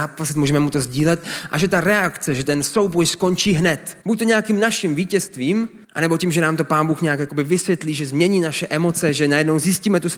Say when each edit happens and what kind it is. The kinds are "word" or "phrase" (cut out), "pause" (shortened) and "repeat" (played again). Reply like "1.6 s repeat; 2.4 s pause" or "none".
4.0 s pause; 5.8 s pause

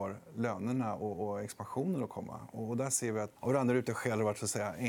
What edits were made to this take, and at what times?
3.4 s phrase

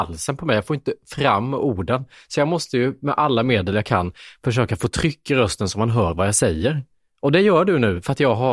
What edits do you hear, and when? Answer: none

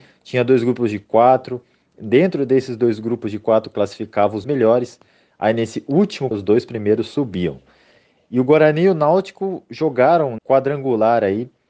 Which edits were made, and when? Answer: 4.4 s word; 6.3 s word; 10.4 s word

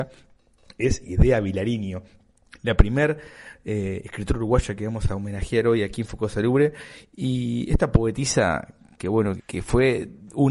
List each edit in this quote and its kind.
9.4 s word

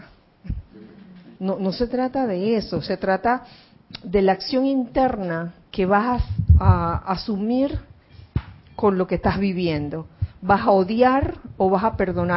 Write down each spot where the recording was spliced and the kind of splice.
1.4 s pause; 5.7 s pause

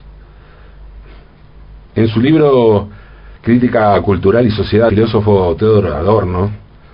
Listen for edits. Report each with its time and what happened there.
1.9 s pause; 3.4 s pause; 4.9 s word

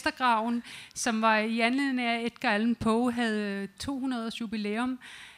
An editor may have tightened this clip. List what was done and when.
none

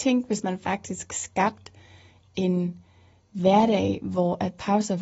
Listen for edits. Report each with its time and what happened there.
none

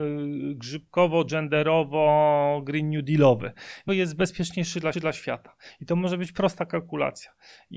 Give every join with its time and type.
3.9 s phrase; 4.9 s repeat

